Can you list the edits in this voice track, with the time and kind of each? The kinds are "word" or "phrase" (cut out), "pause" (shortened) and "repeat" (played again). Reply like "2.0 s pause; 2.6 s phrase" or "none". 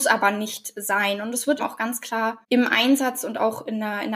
1.6 s word; 2.4 s pause